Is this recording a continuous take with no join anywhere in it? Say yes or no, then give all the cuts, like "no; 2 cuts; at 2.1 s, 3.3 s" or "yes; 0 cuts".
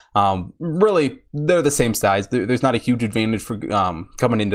yes; 0 cuts